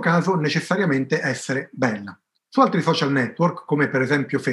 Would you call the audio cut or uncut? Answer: cut